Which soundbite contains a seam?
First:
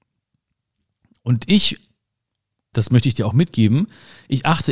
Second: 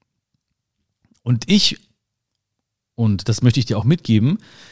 first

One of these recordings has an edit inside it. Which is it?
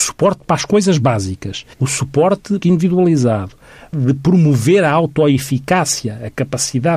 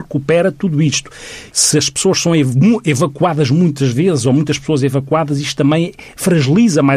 first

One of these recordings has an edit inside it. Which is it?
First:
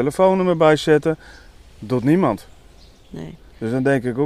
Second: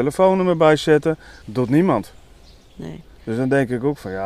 second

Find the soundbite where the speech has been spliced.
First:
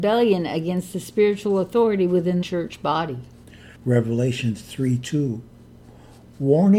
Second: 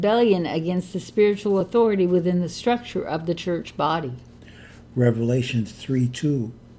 first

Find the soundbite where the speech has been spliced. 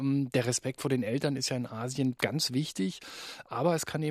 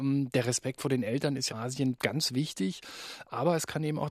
second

